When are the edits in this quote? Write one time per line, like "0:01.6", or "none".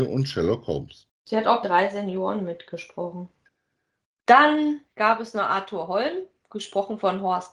0:01.6
0:04.9